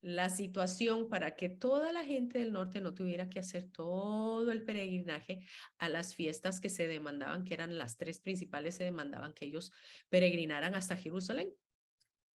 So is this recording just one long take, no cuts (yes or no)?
yes